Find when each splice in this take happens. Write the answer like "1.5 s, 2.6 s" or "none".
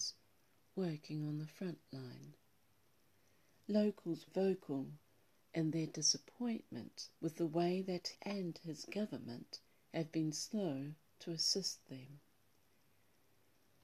4.3 s, 7.2 s, 8.1 s, 9.7 s